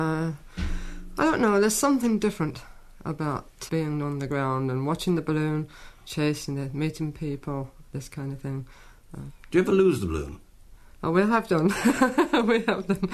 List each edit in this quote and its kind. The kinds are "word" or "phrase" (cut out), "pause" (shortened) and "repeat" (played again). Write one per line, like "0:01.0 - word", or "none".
0:03.7 - word